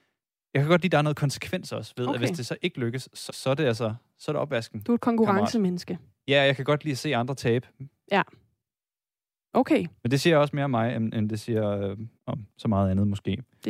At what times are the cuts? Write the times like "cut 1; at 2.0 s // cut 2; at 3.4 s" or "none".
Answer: cut 1; at 3.3 s // cut 2; at 12.2 s